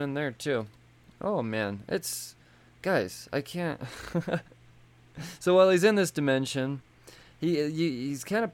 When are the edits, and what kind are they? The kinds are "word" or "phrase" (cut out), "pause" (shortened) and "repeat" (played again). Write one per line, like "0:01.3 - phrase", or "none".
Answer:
none